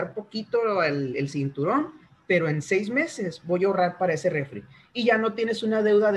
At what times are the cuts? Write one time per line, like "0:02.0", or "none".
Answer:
none